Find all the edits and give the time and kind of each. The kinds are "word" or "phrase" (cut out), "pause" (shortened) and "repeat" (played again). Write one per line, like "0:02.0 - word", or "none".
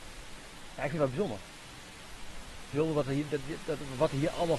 none